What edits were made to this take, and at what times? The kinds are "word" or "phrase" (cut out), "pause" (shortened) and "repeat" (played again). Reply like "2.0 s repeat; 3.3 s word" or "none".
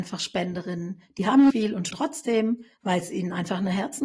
1.5 s word; 1.9 s word